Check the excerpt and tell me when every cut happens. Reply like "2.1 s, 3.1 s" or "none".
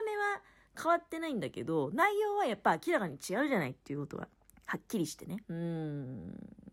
4.4 s, 5.4 s